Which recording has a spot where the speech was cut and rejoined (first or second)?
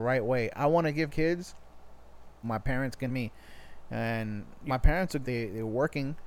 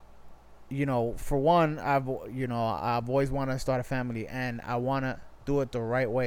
first